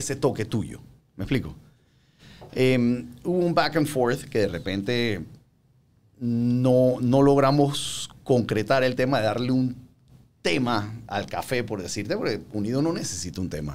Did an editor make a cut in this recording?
no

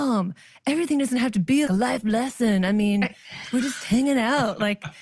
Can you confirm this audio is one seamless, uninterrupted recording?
no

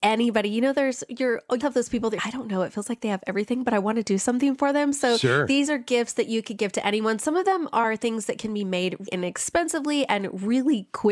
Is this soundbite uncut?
no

